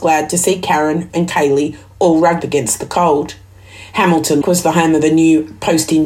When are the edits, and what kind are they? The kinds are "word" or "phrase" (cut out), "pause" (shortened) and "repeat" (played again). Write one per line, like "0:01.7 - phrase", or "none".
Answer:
0:01.1 - word
0:02.4 - word
0:04.4 - word